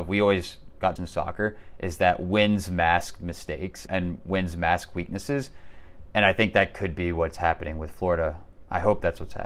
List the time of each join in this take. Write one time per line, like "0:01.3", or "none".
0:01.0
0:03.9